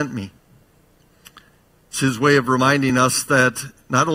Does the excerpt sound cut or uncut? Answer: uncut